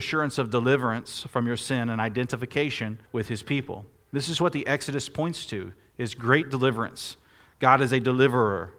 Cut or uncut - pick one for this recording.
cut